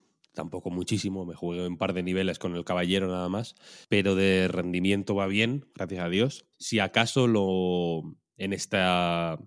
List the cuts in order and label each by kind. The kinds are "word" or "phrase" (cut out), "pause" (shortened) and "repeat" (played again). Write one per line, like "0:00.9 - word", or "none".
0:03.8 - pause
0:06.5 - pause